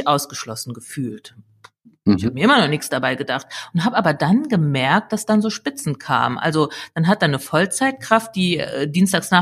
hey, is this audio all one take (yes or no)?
yes